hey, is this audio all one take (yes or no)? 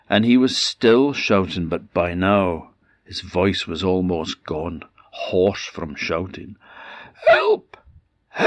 yes